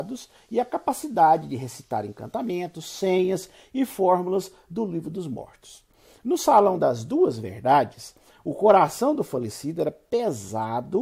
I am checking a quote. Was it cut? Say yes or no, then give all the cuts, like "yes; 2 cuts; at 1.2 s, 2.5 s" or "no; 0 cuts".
no; 0 cuts